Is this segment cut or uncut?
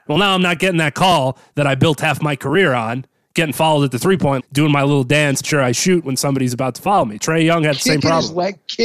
cut